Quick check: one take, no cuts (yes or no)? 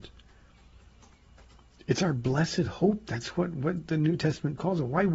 yes